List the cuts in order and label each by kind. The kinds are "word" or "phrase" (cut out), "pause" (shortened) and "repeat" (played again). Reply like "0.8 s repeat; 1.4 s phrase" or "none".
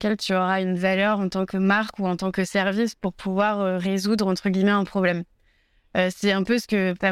none